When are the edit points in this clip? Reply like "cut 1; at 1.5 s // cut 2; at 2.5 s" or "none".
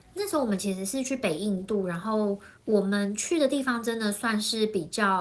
cut 1; at 2.6 s

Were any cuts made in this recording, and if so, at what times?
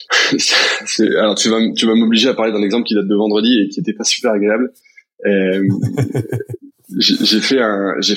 none

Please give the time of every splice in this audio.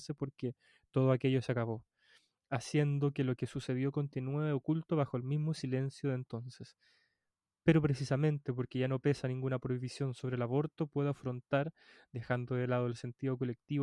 none

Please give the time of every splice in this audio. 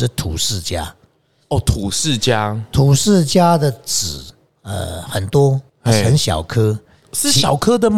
cut 1; at 5.7 s

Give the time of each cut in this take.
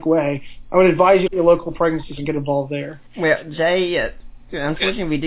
cut 1; at 1.3 s // cut 2; at 2.2 s // cut 3; at 3.1 s

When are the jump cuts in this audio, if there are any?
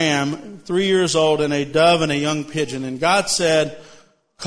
none

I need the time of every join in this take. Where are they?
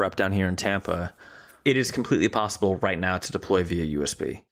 none

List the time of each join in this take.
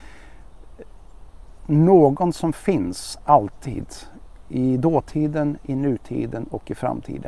none

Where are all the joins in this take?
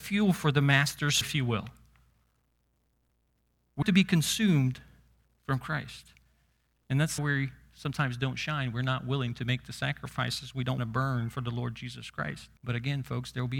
cut 1; at 1.2 s // cut 2; at 3.8 s // cut 3; at 7.2 s // cut 4; at 10.8 s // cut 5; at 12.6 s

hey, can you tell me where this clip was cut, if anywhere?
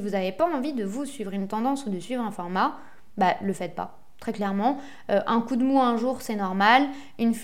none

